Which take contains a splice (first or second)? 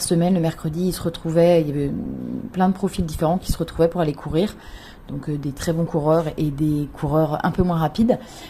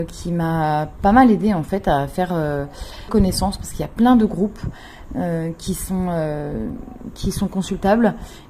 second